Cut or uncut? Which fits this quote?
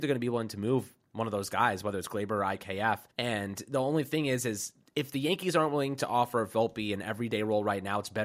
cut